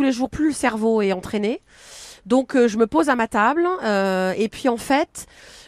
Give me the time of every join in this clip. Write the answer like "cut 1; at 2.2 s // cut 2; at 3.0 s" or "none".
none